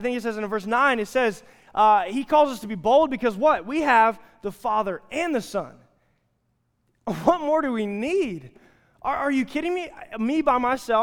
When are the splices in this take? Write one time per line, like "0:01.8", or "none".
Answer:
none